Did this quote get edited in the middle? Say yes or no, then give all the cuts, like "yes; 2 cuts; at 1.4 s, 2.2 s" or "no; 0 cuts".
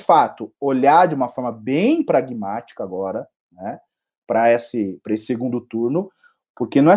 no; 0 cuts